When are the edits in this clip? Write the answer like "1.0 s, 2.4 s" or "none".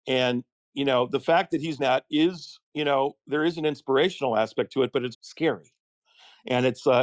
1.8 s, 2.6 s, 5.1 s

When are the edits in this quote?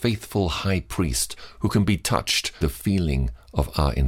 2.6 s

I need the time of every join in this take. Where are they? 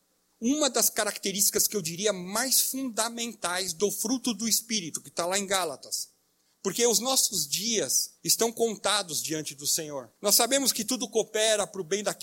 6.5 s, 8.2 s, 10.2 s

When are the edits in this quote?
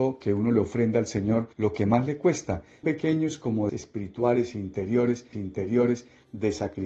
1.5 s, 2.8 s, 3.7 s, 5.3 s

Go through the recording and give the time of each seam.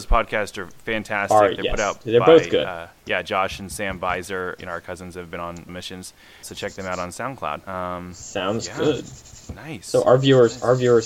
3.0 s, 4.6 s, 5.7 s, 6.4 s, 7.6 s

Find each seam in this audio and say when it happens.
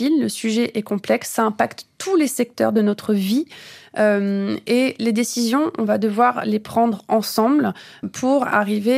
8.0 s

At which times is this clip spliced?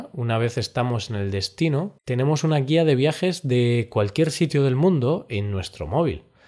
2.0 s

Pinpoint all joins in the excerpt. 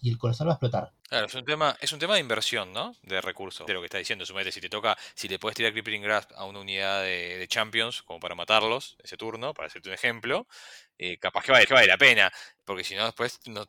1.0 s, 3.7 s, 11.6 s

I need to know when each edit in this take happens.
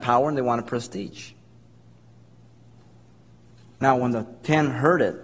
none

